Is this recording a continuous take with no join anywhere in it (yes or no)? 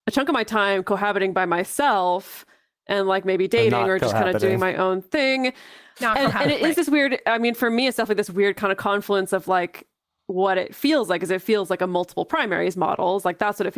yes